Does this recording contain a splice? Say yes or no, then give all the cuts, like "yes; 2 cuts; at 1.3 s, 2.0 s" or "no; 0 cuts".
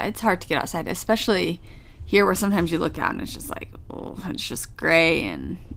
no; 0 cuts